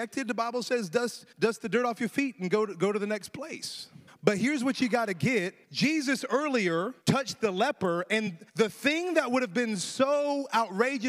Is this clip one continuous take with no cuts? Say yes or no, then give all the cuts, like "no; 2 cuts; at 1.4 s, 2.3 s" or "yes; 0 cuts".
no; 5 cuts; at 1.3 s, 4.1 s, 5.6 s, 7.0 s, 8.5 s